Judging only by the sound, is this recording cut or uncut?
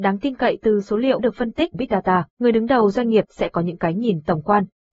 cut